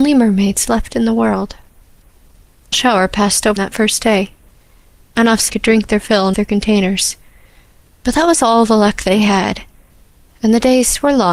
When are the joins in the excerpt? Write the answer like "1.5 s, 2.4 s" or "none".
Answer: 2.7 s, 3.6 s, 5.5 s, 6.3 s